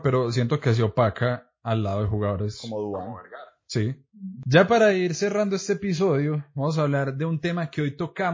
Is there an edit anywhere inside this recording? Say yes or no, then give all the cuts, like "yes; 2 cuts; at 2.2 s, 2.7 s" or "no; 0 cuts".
no; 0 cuts